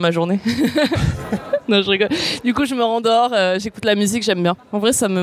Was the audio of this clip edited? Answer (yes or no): no